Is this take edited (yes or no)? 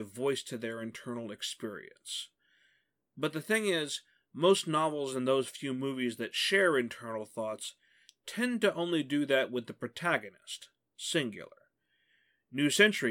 no